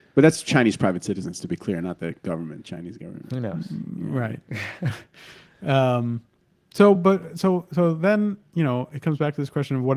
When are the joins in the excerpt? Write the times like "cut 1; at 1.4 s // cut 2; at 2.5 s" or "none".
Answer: none

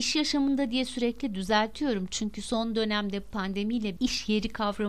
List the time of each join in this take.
cut 1; at 4.0 s

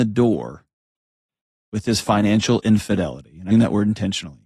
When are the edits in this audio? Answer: cut 1; at 3.5 s

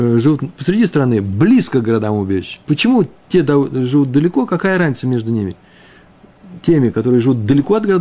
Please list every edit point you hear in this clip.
cut 1; at 2.6 s

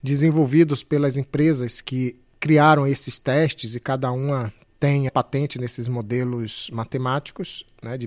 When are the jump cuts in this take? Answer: cut 1; at 5.1 s

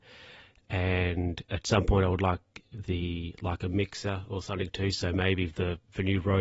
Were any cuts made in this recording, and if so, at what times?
none

